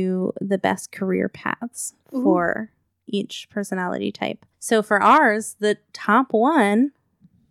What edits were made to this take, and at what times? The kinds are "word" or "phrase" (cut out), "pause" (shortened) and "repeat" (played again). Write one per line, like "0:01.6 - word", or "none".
0:02.9 - pause
0:04.5 - pause